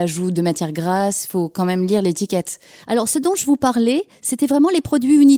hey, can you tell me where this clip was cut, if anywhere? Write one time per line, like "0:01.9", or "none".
none